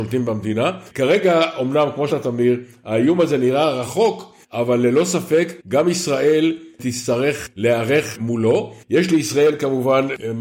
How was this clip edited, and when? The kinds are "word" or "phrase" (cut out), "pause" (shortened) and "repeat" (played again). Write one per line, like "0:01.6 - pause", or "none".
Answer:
0:02.1 - word
0:04.4 - pause
0:05.6 - pause
0:08.8 - pause